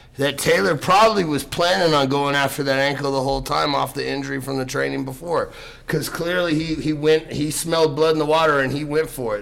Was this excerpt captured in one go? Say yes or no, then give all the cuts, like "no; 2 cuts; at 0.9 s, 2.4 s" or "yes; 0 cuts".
yes; 0 cuts